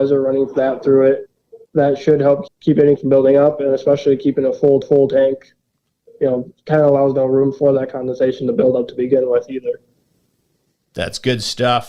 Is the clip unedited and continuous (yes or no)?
no